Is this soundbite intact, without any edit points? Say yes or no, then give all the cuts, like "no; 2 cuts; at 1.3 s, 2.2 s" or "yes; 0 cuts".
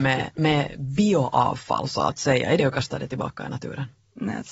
no; 1 cut; at 2.6 s